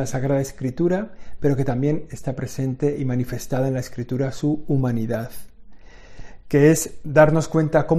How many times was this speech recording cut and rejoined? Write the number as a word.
zero